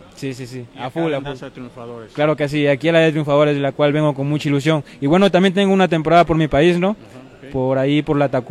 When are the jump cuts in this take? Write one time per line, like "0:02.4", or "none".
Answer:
none